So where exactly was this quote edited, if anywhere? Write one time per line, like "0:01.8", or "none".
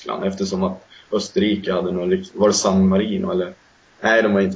none